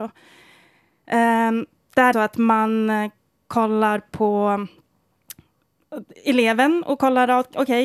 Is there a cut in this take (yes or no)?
yes